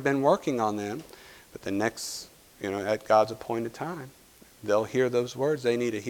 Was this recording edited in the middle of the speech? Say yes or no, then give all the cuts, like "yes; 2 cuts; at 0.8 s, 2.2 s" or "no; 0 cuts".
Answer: no; 0 cuts